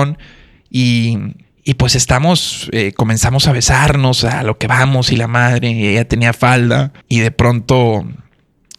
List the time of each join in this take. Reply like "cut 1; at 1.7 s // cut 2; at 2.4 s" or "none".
cut 1; at 1.4 s // cut 2; at 7.0 s

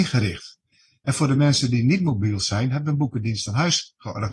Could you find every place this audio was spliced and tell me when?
none

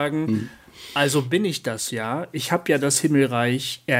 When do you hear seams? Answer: none

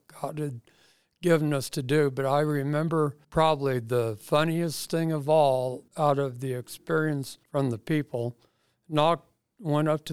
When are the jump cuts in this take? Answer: cut 1; at 3.2 s // cut 2; at 5.9 s // cut 3; at 7.4 s

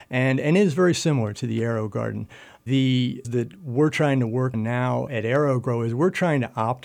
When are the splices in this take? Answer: cut 1; at 3.2 s // cut 2; at 4.5 s // cut 3; at 5.1 s

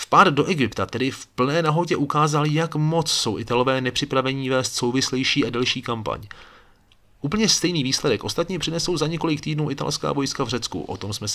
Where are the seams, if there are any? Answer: none

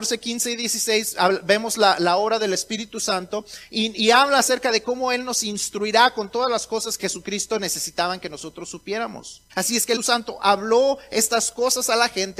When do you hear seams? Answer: cut 1; at 7.0 s // cut 2; at 9.5 s // cut 3; at 10.0 s

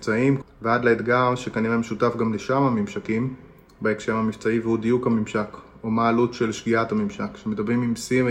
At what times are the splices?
none

